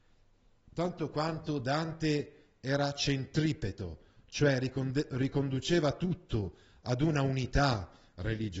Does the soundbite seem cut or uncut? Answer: uncut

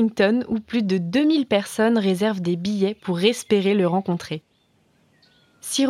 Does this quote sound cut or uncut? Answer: uncut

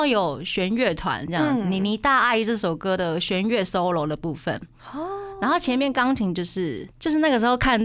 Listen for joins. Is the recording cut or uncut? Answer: uncut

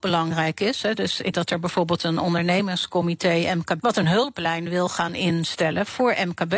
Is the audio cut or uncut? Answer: cut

